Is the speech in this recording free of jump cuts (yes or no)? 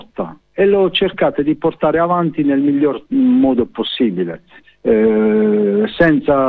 yes